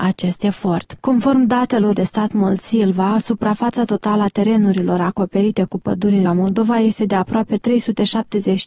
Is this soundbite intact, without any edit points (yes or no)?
no